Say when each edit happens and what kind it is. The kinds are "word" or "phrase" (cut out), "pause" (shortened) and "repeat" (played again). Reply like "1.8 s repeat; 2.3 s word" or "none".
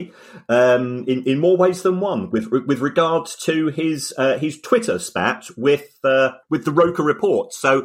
6.4 s pause